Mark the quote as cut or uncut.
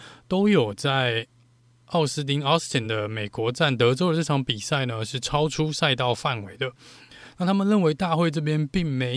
uncut